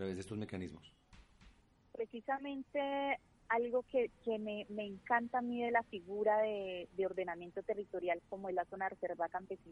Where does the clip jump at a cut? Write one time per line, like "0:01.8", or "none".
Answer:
0:01.6